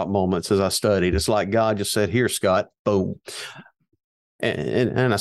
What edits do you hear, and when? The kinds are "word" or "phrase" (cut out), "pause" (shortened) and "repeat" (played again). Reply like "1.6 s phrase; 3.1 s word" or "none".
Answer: none